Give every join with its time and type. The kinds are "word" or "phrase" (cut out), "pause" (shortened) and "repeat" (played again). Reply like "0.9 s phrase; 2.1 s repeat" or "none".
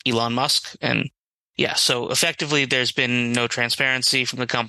none